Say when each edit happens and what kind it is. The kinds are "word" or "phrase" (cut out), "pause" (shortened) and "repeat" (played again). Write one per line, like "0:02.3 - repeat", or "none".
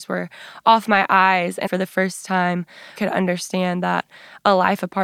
0:01.7 - word
0:03.0 - word